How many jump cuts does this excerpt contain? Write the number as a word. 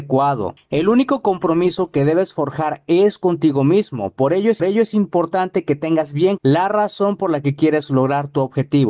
two